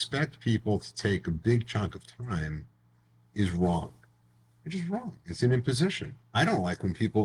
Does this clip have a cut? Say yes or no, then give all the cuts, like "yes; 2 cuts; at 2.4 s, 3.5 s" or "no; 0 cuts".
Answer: no; 0 cuts